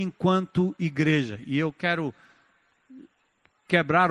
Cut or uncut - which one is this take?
uncut